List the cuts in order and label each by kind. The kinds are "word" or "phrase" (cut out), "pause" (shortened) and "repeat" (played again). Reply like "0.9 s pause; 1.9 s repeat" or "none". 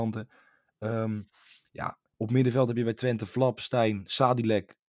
2.1 s pause